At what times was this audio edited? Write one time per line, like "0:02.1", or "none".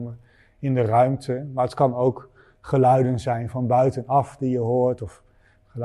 none